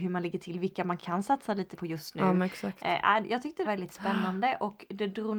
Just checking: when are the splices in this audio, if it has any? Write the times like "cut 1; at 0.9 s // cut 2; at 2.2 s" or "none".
cut 1; at 1.0 s // cut 2; at 1.7 s // cut 3; at 3.7 s